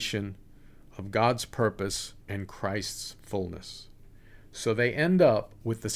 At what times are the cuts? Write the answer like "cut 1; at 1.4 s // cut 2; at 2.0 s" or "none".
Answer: cut 1; at 2.2 s